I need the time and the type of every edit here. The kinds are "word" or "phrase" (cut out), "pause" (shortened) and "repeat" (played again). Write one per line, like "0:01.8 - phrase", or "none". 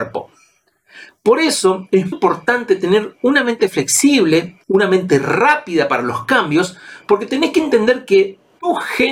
0:02.1 - word
0:04.6 - pause